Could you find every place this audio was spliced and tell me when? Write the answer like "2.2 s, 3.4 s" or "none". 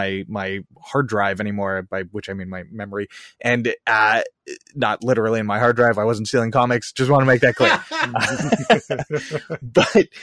none